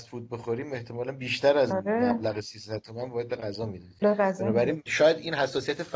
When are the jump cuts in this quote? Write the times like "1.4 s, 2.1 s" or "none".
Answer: 1.7 s, 3.3 s, 4.0 s, 4.9 s

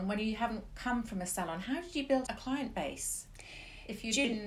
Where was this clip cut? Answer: 2.3 s

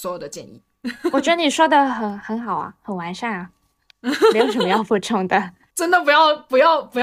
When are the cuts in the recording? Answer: 5.7 s

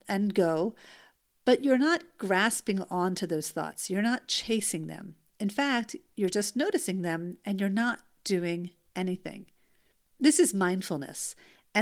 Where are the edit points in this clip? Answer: none

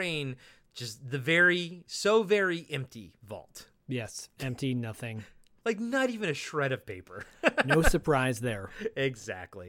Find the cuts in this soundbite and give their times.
3.8 s

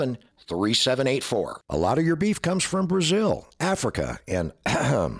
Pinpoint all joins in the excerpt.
1.6 s

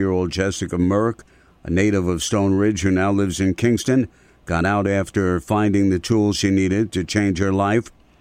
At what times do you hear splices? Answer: none

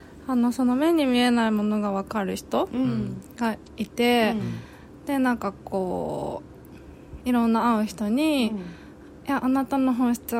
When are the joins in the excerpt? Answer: 3.7 s

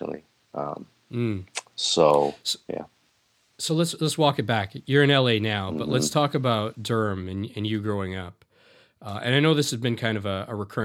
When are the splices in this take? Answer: none

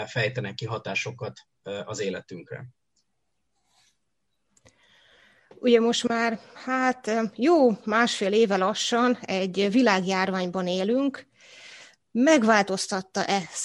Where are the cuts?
none

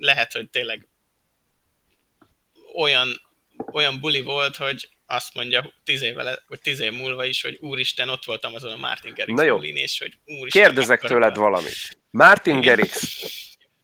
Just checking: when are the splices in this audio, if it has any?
12.0 s

